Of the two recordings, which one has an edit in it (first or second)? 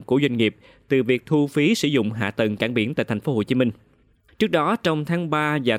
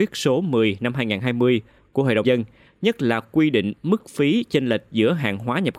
second